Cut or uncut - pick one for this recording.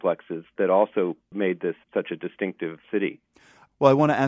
cut